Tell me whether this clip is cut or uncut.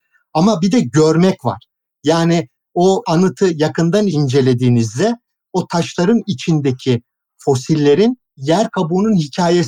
uncut